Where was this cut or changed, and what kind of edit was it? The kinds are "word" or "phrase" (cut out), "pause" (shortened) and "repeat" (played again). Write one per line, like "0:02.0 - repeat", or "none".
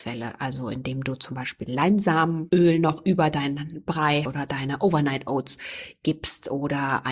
0:04.3 - word